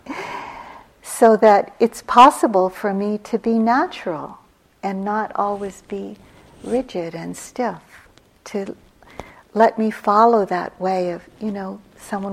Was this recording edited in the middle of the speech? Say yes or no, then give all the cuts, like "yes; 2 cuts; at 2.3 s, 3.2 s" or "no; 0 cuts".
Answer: no; 0 cuts